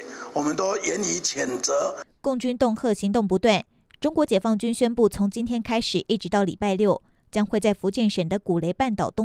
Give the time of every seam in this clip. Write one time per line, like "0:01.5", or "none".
none